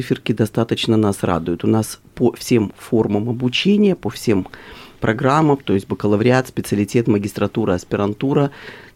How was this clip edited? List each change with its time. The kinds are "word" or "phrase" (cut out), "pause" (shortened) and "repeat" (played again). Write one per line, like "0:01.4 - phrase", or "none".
none